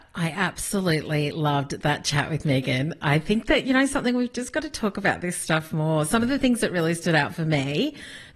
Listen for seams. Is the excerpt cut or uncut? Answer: uncut